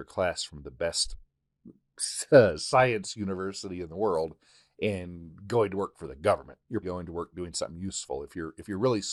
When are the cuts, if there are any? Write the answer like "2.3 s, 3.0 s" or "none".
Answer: 6.8 s